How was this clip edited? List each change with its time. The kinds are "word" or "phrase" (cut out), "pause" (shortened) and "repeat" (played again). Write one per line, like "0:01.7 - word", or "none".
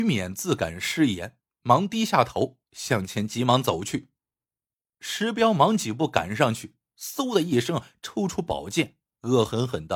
none